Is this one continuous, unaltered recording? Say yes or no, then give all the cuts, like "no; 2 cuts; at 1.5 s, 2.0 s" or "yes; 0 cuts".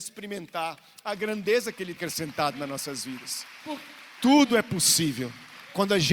no; 1 cut; at 2.0 s